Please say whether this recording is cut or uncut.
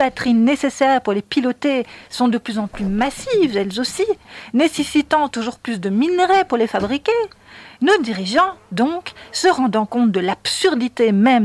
uncut